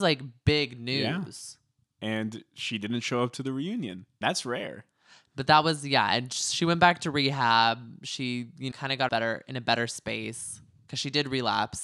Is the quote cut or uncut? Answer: cut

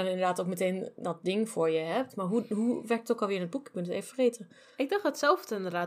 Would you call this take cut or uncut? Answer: uncut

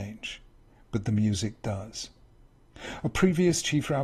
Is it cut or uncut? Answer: uncut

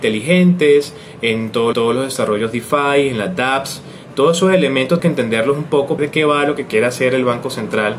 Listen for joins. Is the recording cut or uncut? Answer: cut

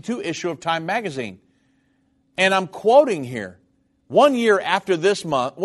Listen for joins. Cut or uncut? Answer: uncut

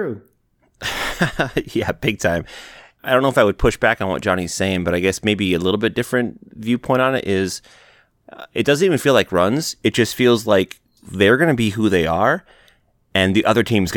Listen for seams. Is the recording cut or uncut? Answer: uncut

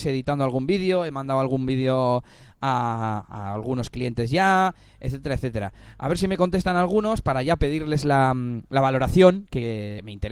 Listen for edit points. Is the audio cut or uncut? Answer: uncut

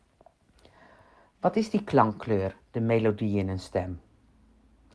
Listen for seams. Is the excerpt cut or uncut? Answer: uncut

